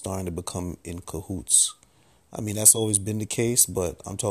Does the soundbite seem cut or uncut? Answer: uncut